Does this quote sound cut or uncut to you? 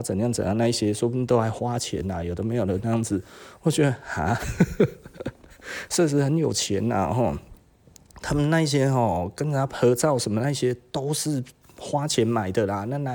cut